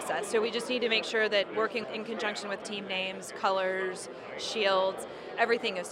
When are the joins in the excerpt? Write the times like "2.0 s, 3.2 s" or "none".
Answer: 1.8 s, 2.6 s

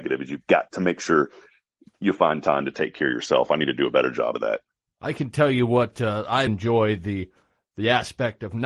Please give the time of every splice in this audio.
6.5 s

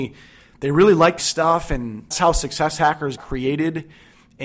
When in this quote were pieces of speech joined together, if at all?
1.2 s, 2.1 s, 3.2 s

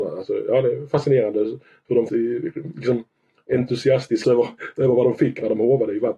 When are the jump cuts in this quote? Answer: 2.1 s, 4.2 s

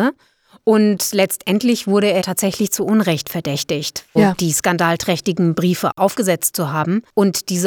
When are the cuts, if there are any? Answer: 2.2 s, 4.2 s

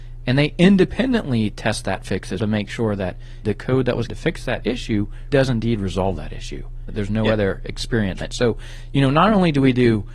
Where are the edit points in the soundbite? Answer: 2.4 s, 3.4 s, 4.1 s, 5.3 s, 6.9 s, 8.2 s

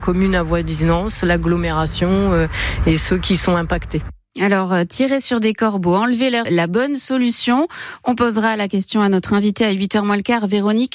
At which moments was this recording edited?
6.4 s

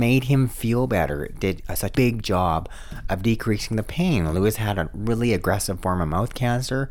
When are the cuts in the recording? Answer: 1.9 s

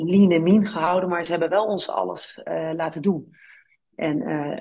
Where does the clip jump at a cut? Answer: none

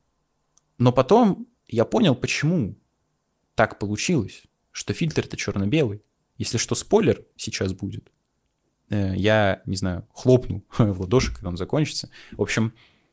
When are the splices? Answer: none

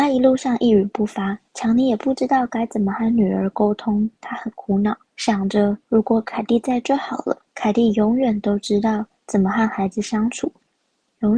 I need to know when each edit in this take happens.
1.5 s, 5.1 s, 5.8 s, 7.5 s, 9.2 s

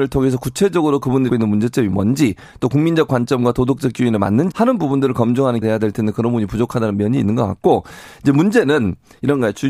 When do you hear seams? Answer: 1.3 s, 4.5 s, 5.6 s

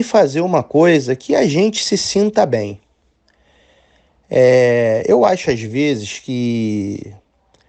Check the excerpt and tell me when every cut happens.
none

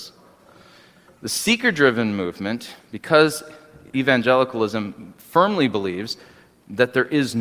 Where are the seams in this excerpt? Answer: none

